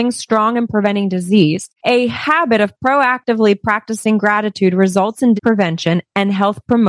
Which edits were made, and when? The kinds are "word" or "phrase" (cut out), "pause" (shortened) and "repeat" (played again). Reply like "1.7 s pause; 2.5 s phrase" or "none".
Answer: 1.8 s pause; 5.4 s word

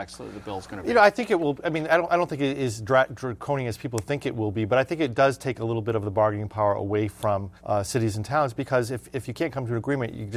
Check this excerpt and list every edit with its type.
7.6 s pause

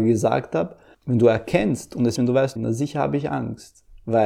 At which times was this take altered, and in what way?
2.2 s word; 2.6 s word

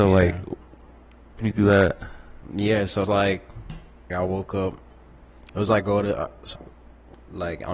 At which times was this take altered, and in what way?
1.4 s word; 3.0 s word; 4.1 s word; 5.8 s word; 6.5 s word

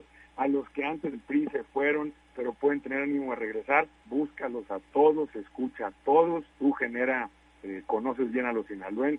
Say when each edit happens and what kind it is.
1.1 s word; 4.0 s word; 6.5 s pause

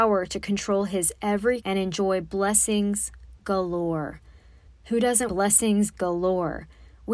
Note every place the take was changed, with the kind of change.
1.6 s word; 4.7 s pause; 5.3 s word

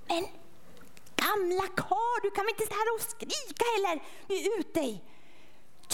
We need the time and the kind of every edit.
2.7 s word; 4.3 s word

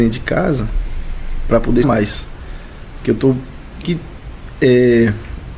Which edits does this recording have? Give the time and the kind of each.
1.8 s word; 3.8 s word

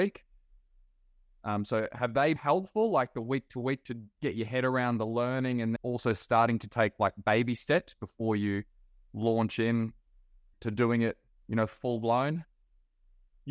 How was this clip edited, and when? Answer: 2.4 s word; 5.8 s word; 10.5 s word

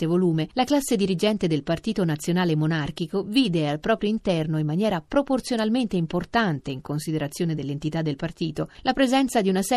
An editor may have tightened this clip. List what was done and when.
none

